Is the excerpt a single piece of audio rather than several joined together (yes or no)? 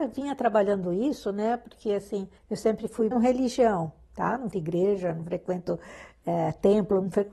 no